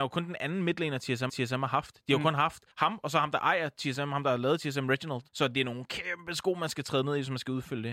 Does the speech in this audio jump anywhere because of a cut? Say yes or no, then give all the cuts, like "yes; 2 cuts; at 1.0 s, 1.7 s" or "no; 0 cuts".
yes; 3 cuts; at 1.3 s, 2.7 s, 5.3 s